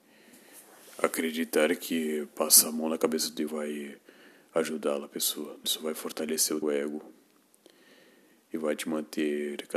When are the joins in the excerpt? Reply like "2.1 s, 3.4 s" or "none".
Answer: 3.5 s, 5.6 s, 6.6 s